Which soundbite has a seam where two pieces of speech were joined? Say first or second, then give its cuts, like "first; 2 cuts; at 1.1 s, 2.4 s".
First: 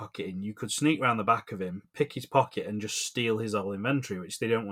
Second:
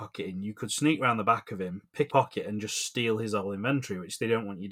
second; 1 cut; at 2.1 s